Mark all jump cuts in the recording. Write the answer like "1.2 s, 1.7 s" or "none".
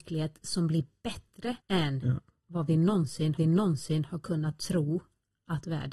1.6 s, 3.4 s